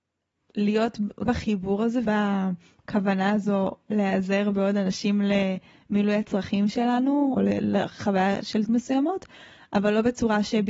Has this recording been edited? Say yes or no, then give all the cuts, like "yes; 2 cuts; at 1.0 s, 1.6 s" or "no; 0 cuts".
yes; 4 cuts; at 1.3 s, 2.0 s, 7.4 s, 8.7 s